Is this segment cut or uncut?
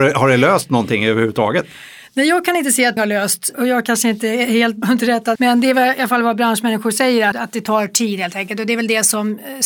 cut